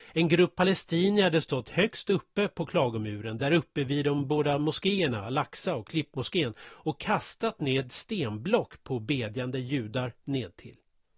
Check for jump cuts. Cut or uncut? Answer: uncut